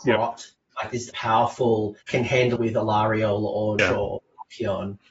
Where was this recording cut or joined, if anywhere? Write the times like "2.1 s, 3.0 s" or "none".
1.1 s, 2.0 s, 2.6 s, 3.8 s